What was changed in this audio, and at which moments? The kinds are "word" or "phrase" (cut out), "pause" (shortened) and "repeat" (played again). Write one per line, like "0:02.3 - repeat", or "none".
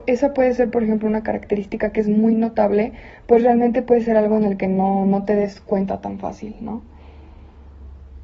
none

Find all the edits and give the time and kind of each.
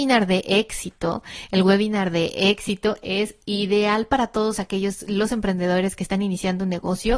none

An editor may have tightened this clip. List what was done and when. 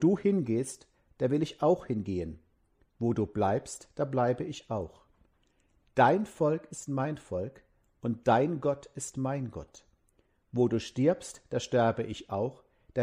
none

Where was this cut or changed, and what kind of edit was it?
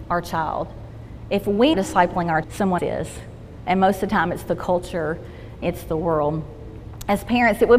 0:01.7 - word
0:02.4 - word
0:02.8 - word
0:05.6 - word

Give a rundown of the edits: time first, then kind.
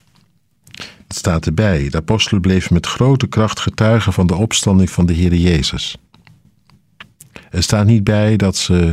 none

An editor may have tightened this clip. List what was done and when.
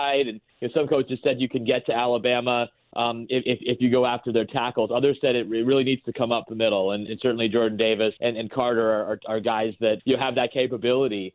0:07.1 - word
0:08.2 - word
0:10.0 - word

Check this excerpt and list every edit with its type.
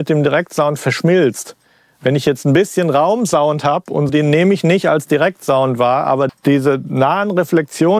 0:04.1 - word
0:06.3 - word

